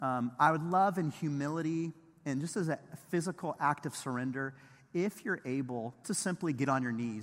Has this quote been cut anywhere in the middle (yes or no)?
yes